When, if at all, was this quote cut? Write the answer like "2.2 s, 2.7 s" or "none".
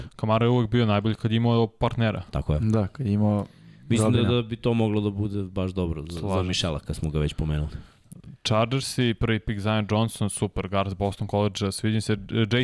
none

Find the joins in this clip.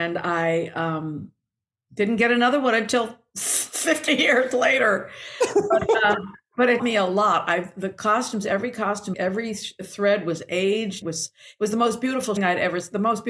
6.8 s, 9.1 s, 11.0 s, 12.4 s

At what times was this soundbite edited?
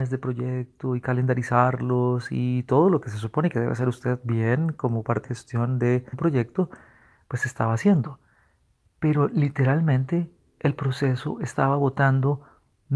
5.2 s, 6.1 s

